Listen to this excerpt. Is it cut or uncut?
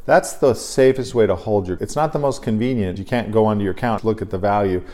cut